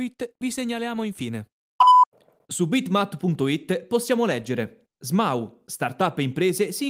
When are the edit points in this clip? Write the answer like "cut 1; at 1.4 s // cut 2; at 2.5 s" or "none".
cut 1; at 4.9 s

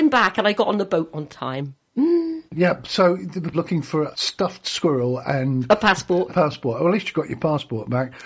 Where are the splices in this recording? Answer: cut 1; at 2.5 s // cut 2; at 3.5 s // cut 3; at 4.1 s // cut 4; at 6.3 s

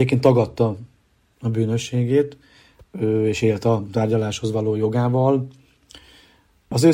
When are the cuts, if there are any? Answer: none

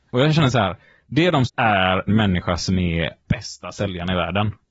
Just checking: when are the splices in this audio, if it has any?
cut 1; at 1.5 s // cut 2; at 2.1 s // cut 3; at 3.2 s

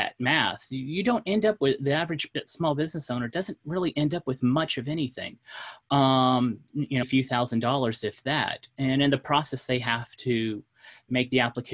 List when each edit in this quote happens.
cut 1; at 7.0 s

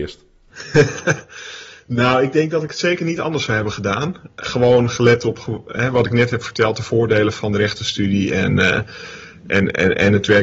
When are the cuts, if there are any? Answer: none

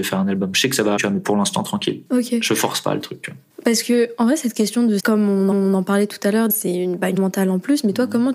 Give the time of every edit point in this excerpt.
cut 1; at 1.0 s // cut 2; at 2.1 s // cut 3; at 3.5 s // cut 4; at 5.0 s // cut 5; at 5.5 s // cut 6; at 6.5 s // cut 7; at 7.2 s

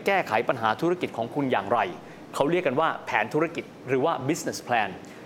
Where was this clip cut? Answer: none

